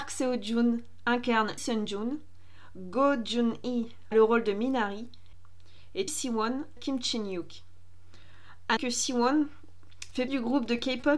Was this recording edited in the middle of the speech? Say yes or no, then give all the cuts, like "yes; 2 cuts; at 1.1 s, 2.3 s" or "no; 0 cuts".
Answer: yes; 6 cuts; at 1.6 s, 4.1 s, 6.1 s, 6.8 s, 8.8 s, 10.3 s